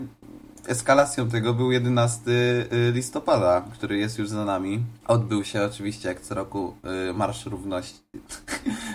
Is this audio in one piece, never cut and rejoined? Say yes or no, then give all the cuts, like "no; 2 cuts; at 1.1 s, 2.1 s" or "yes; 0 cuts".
no; 1 cut; at 5.0 s